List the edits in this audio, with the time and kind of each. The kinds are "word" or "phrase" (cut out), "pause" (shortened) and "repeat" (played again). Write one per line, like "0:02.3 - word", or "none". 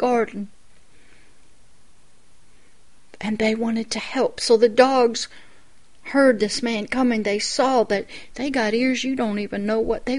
none